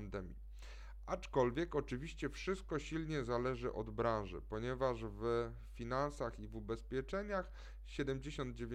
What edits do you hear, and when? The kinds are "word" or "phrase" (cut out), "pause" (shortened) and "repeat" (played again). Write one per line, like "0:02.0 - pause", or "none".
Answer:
none